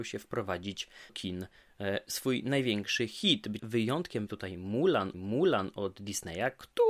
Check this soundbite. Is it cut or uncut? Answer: cut